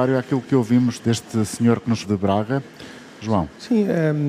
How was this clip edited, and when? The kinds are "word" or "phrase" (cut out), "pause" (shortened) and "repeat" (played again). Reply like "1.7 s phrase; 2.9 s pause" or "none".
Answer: 1.0 s word; 2.0 s word